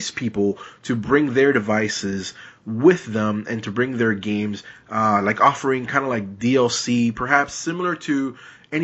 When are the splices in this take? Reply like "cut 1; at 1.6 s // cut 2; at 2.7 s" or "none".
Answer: none